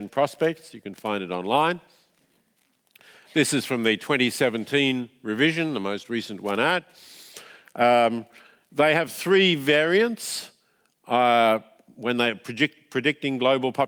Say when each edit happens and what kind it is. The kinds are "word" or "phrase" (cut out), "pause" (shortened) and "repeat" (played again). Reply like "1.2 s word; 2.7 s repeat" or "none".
none